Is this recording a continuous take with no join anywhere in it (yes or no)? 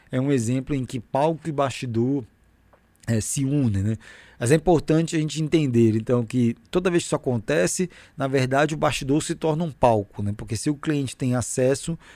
yes